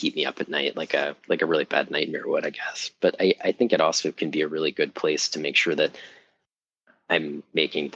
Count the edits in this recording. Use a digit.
0